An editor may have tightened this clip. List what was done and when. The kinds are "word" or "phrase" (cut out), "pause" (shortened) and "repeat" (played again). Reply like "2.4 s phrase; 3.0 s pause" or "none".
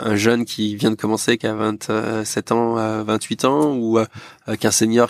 none